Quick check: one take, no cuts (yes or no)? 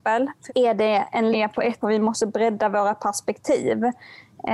no